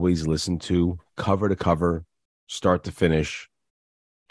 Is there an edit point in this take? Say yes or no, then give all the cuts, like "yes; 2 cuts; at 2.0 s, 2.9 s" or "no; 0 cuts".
no; 0 cuts